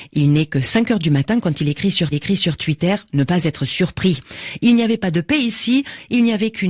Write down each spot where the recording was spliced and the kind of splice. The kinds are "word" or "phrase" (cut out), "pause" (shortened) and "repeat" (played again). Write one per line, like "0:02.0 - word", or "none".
0:02.1 - repeat